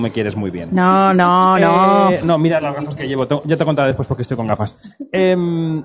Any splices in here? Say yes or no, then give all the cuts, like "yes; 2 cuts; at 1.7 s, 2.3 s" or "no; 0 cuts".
no; 0 cuts